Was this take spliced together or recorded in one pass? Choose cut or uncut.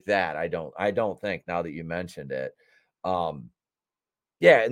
uncut